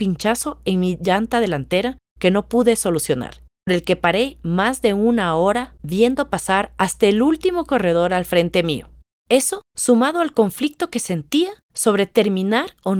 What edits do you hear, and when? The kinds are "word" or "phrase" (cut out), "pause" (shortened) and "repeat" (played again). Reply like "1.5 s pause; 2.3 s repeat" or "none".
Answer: 3.7 s word; 9.7 s pause